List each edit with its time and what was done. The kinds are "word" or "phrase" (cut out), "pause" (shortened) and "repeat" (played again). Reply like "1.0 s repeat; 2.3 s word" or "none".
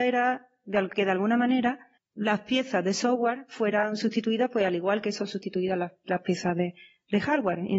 2.0 s word